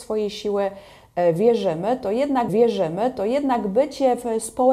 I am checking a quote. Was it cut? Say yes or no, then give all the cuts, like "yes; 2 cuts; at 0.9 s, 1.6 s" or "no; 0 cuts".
yes; 1 cut; at 2.5 s